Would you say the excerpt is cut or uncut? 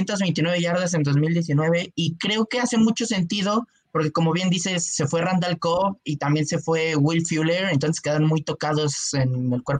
uncut